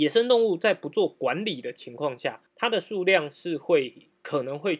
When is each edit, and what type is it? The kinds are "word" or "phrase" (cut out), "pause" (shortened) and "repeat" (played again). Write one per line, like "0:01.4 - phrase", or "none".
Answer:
0:02.5 - pause